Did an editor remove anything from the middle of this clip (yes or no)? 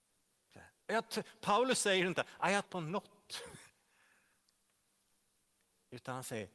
yes